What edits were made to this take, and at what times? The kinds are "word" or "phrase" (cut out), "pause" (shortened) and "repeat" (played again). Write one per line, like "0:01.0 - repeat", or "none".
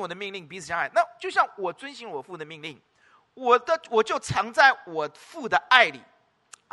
none